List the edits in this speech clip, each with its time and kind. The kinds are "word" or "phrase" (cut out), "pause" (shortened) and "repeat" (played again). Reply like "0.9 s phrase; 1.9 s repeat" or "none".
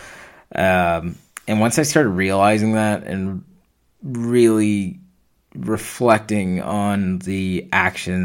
none